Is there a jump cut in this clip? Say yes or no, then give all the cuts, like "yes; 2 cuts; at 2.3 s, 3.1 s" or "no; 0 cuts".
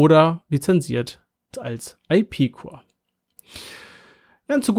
yes; 1 cut; at 1.5 s